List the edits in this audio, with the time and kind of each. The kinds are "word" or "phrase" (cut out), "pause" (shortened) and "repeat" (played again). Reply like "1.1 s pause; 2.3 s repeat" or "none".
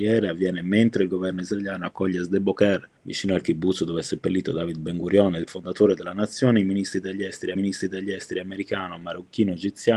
3.0 s pause; 5.5 s word; 7.6 s repeat